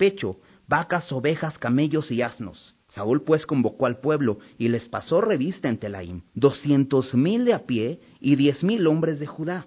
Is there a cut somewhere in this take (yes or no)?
yes